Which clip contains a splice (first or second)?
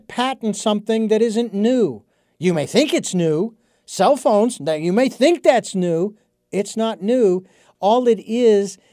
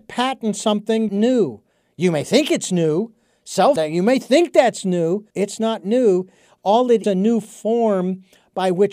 second